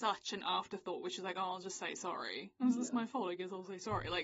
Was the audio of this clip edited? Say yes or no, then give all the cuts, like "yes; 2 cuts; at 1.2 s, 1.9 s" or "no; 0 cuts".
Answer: no; 0 cuts